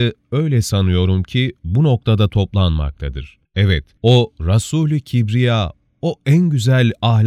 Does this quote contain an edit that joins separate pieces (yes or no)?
no